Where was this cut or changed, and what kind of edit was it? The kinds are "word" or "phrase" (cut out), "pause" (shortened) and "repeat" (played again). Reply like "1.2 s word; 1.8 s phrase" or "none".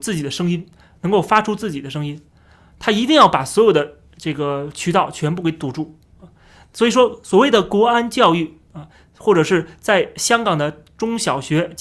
none